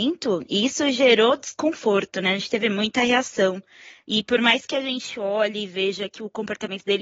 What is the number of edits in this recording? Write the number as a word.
zero